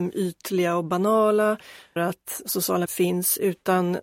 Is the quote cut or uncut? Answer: cut